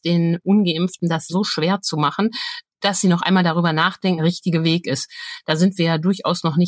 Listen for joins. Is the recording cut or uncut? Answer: cut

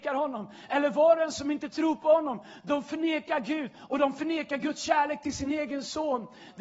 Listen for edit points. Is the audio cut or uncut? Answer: uncut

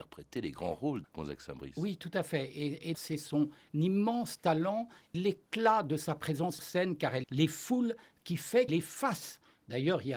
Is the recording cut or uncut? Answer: cut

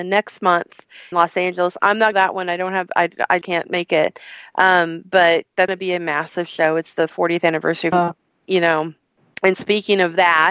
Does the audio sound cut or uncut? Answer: cut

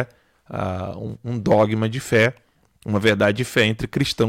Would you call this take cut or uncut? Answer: uncut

